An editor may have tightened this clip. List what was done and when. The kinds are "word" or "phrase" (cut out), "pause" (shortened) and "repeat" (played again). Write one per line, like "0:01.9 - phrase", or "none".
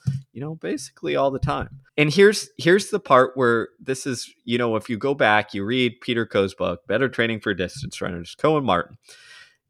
0:01.9 - pause